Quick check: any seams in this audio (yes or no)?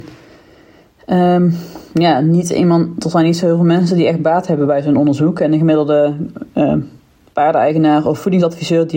no